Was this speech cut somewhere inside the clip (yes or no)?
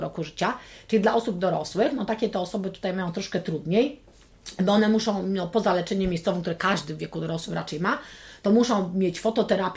no